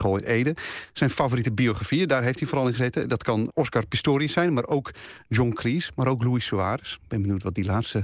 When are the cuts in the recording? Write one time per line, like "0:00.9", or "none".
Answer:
0:03.5